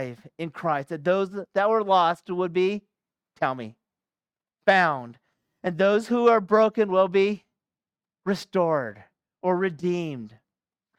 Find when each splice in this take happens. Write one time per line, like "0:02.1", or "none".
none